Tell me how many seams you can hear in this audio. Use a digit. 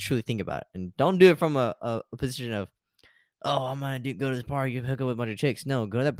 0